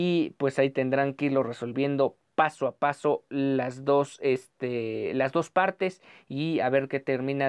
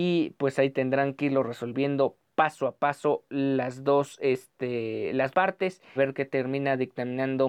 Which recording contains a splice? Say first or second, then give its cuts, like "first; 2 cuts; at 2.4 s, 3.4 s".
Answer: second; 2 cuts; at 5.3 s, 6.0 s